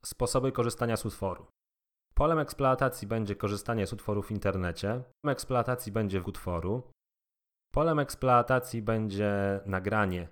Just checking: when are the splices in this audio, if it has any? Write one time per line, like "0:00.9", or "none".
0:01.8
0:05.2
0:06.2